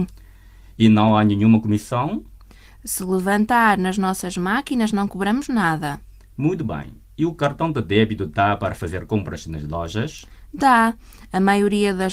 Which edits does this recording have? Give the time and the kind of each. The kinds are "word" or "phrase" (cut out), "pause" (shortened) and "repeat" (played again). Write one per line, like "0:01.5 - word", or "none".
none